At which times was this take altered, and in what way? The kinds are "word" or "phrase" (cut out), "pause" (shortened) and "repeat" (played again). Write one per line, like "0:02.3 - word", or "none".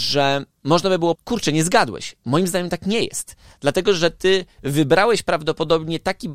0:01.2 - word